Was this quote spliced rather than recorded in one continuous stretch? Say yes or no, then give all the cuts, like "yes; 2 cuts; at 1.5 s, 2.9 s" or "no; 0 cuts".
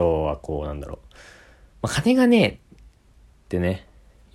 no; 0 cuts